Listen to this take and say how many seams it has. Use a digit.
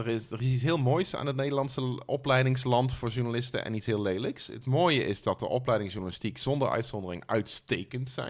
0